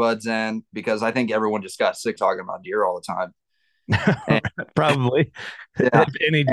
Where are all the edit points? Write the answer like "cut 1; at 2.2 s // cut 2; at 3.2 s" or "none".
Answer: cut 1; at 2.2 s